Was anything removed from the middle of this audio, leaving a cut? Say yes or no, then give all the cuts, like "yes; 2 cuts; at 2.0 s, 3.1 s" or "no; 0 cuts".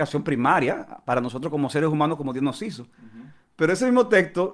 no; 0 cuts